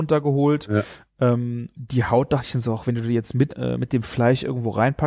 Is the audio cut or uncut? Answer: cut